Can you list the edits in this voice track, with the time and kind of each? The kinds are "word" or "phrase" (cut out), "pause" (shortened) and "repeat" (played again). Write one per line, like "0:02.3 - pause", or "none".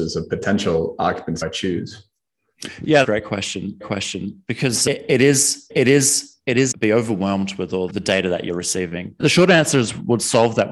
0:01.4 - phrase
0:03.0 - phrase
0:03.8 - repeat
0:05.7 - repeat
0:06.7 - phrase
0:07.9 - word
0:09.2 - word